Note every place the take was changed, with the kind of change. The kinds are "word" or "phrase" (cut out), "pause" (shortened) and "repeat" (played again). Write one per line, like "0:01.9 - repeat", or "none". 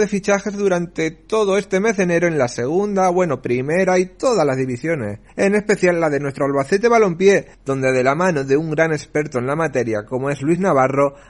0:05.3 - pause
0:07.5 - pause